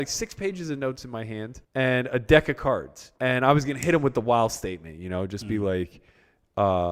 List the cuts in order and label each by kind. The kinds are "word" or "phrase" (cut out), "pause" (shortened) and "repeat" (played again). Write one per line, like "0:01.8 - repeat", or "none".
0:01.6 - pause
0:03.2 - pause